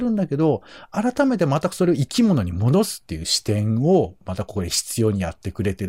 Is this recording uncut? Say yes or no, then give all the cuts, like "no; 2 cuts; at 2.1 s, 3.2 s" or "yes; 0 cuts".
yes; 0 cuts